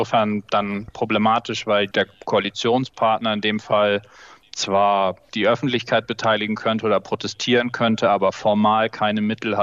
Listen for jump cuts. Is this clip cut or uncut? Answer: uncut